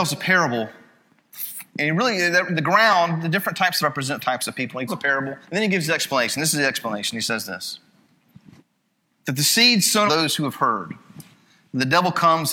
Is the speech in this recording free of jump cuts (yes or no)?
no